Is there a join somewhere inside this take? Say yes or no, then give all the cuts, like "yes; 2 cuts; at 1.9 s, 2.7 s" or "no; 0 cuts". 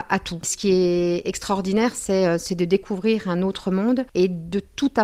no; 0 cuts